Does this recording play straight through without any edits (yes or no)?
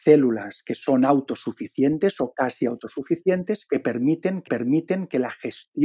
no